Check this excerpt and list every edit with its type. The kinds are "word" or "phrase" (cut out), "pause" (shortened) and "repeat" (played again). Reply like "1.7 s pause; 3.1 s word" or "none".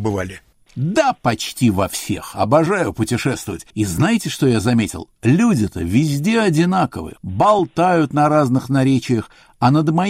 3.7 s pause

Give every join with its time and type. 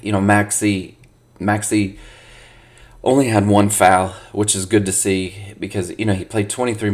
none

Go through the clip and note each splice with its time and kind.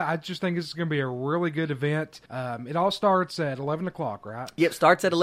2.3 s pause

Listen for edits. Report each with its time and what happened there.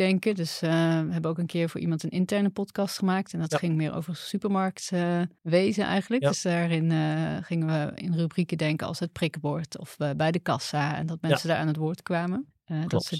5.4 s pause

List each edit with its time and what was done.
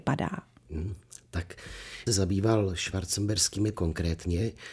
2.1 s phrase; 3.7 s word

